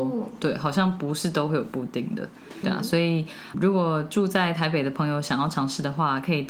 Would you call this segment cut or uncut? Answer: cut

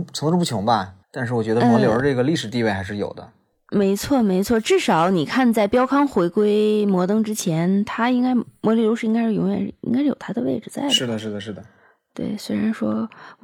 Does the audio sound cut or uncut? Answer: cut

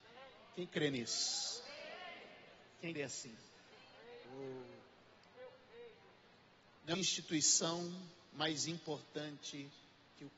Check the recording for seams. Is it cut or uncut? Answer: cut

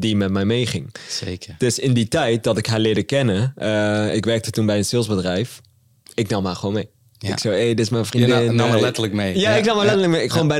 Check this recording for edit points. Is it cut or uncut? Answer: uncut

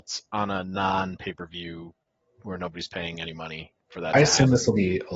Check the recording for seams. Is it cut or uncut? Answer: uncut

